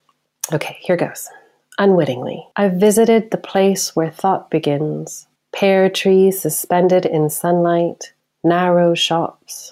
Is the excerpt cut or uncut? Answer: cut